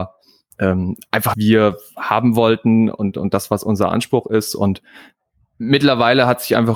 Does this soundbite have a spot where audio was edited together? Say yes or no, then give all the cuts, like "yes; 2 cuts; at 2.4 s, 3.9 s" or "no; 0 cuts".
yes; 1 cut; at 1.3 s